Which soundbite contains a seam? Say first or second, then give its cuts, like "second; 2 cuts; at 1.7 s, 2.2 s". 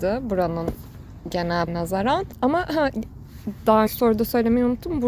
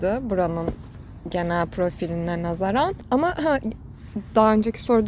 first; 2 cuts; at 1.7 s, 3.9 s